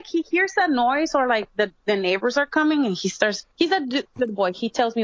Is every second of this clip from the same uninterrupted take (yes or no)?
no